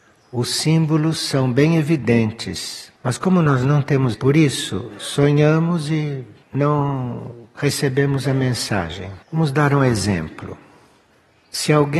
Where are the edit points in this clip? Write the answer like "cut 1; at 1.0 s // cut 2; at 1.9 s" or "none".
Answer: cut 1; at 3.0 s // cut 2; at 4.1 s // cut 3; at 6.4 s // cut 4; at 9.2 s

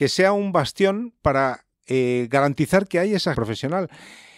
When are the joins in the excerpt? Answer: cut 1; at 3.3 s

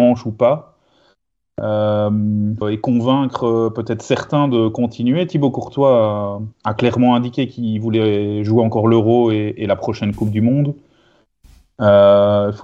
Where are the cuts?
cut 1; at 2.6 s // cut 2; at 6.5 s

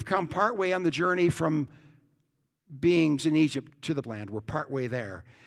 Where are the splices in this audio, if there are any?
cut 1; at 3.2 s // cut 2; at 3.7 s // cut 3; at 4.0 s

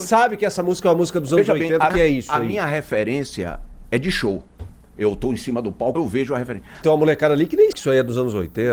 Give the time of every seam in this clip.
cut 1; at 1.9 s // cut 2; at 5.9 s // cut 3; at 6.8 s // cut 4; at 7.7 s

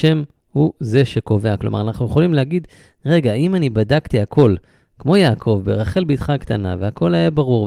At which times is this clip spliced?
none

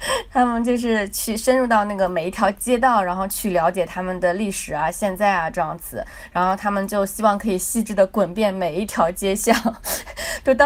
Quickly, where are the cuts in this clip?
none

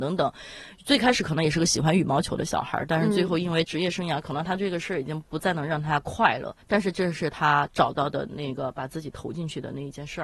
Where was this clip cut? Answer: cut 1; at 6.6 s

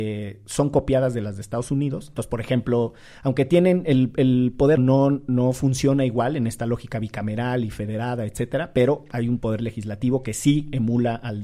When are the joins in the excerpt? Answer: cut 1; at 4.8 s

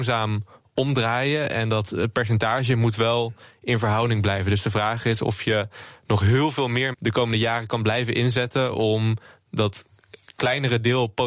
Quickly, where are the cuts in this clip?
cut 1; at 6.9 s

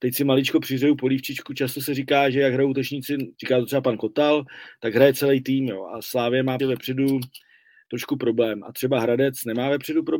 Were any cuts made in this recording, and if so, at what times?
cut 1; at 3.3 s // cut 2; at 6.6 s

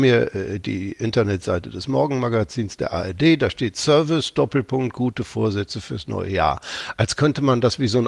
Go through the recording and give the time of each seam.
none

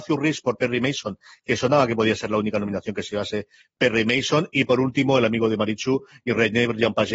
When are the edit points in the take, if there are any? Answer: none

